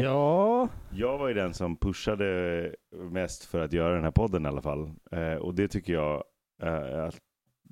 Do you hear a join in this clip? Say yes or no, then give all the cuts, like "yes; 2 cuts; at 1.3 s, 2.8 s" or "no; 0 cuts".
no; 0 cuts